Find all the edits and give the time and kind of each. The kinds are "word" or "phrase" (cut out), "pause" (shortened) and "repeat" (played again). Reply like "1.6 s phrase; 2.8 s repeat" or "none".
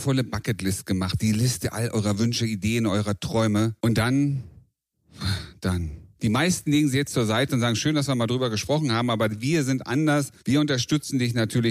3.8 s pause; 6.1 s pause; 10.4 s pause